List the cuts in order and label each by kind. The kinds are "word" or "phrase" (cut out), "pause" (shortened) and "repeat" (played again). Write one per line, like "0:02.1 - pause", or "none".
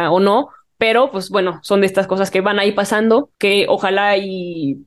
0:03.3 - pause